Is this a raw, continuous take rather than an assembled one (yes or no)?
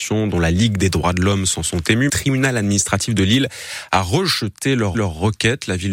no